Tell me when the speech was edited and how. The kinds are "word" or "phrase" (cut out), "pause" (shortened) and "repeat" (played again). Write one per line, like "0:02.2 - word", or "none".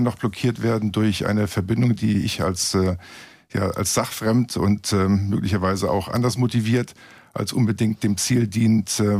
none